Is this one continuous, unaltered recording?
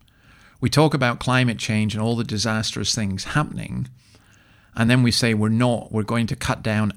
yes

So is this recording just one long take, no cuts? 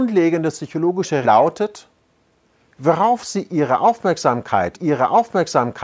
no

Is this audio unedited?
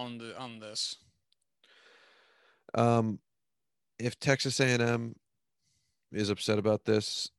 yes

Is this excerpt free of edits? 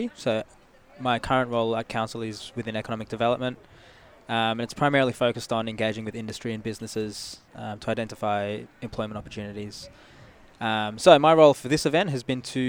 yes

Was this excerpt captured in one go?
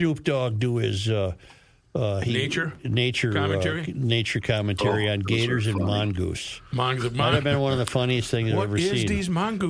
yes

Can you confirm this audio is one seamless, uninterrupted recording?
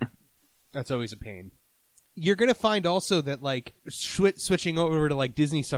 no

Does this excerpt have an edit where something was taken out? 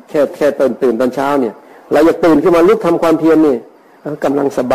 no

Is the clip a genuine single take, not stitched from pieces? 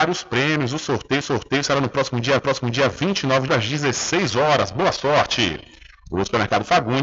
no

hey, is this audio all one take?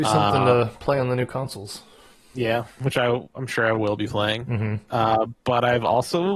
yes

